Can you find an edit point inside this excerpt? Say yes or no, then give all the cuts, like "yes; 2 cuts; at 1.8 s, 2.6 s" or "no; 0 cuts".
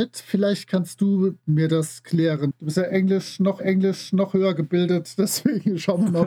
yes; 2 cuts; at 1.4 s, 3.6 s